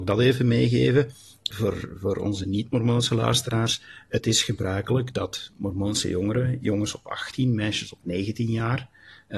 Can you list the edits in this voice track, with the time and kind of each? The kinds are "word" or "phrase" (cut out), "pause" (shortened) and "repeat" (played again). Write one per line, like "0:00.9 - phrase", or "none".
0:01.5 - word

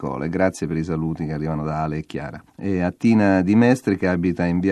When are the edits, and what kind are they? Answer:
0:02.5 - pause

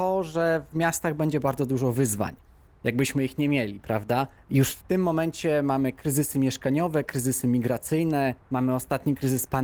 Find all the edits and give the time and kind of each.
0:04.4 - pause
0:08.4 - pause

